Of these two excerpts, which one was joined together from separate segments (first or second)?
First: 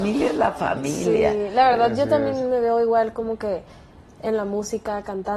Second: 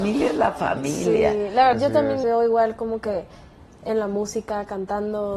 second